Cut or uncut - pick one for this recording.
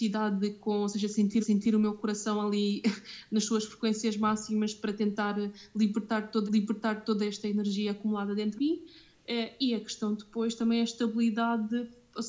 cut